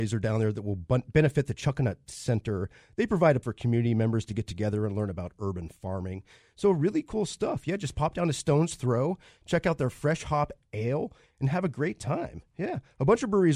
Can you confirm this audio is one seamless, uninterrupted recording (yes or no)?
no